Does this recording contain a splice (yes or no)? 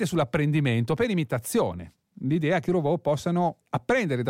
yes